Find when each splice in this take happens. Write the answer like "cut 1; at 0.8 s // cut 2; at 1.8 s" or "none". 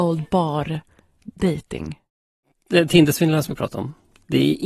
cut 1; at 3.5 s